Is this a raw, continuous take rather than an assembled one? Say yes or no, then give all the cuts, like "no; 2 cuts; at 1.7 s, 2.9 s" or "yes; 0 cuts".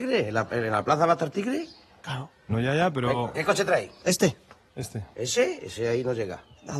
yes; 0 cuts